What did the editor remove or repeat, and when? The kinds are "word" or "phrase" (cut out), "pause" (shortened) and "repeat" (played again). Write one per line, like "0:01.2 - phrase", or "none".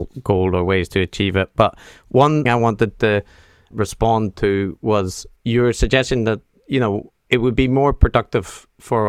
0:02.5 - word